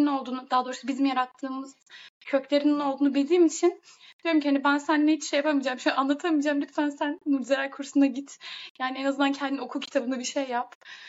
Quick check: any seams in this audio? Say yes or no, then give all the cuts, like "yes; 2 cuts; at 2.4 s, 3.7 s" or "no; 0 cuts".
no; 0 cuts